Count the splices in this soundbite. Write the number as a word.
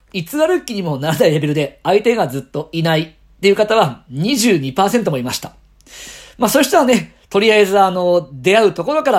zero